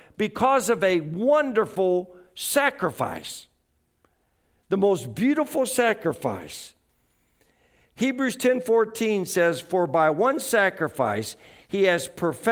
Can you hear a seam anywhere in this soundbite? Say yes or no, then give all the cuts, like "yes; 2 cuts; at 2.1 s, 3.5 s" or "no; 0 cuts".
no; 0 cuts